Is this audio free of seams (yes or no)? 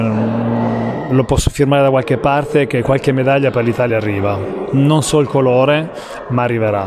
yes